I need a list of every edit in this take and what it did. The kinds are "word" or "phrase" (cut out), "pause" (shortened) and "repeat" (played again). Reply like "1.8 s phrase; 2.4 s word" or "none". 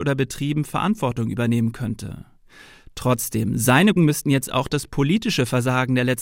4.0 s word